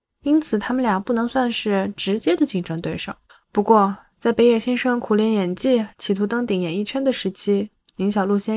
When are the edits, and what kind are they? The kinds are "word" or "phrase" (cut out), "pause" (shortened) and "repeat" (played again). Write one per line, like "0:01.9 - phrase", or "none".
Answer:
0:03.3 - pause

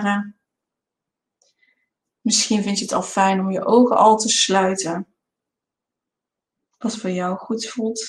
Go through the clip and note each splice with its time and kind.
none

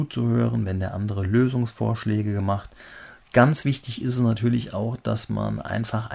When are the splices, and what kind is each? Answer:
none

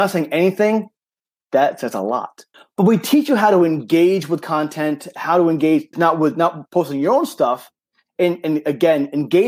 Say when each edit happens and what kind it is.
0:02.5 - pause
0:05.9 - word

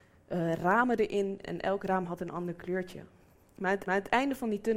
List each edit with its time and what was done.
0:01.4 - word
0:03.9 - repeat

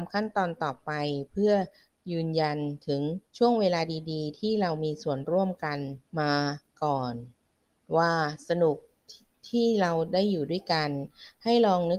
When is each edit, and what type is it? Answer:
0:03.3 - pause
0:06.1 - pause

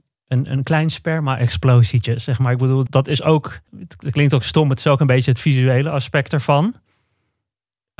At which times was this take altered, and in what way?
0:02.9 - word
0:03.7 - pause

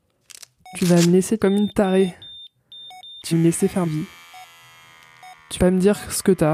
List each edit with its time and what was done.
0:01.4 - word
0:03.3 - word
0:03.8 - word
0:05.6 - word

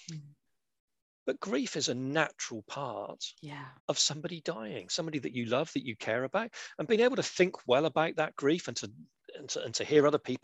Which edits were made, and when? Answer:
0:03.8 - pause

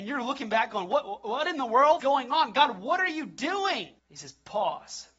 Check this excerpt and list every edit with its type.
0:02.0 - word
0:04.0 - pause

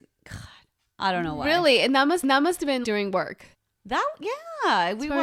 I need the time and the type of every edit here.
0:02.2 - repeat
0:02.8 - word
0:03.5 - pause

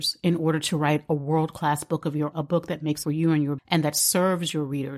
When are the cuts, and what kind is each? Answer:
0:02.3 - word
0:03.0 - phrase
0:03.6 - word

